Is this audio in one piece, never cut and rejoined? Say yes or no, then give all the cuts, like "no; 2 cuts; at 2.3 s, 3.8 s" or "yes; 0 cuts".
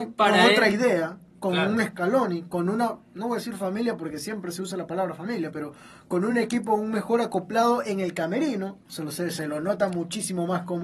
yes; 0 cuts